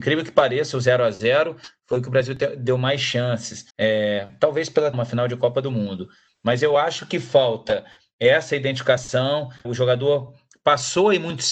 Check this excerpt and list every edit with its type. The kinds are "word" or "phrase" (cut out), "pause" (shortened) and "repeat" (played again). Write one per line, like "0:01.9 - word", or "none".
0:03.7 - pause
0:04.9 - word
0:09.6 - word